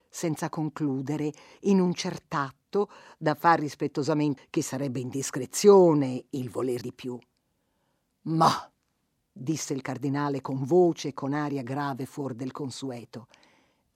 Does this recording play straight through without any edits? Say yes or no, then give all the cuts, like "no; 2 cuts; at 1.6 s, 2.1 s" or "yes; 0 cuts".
no; 2 cuts; at 4.4 s, 6.8 s